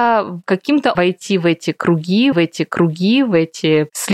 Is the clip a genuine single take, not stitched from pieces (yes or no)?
no